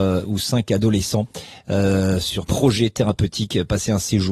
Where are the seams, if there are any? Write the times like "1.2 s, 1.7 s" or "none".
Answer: 2.4 s